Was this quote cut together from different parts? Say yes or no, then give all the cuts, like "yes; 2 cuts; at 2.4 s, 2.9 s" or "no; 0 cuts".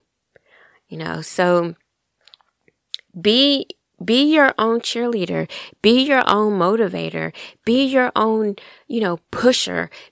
no; 0 cuts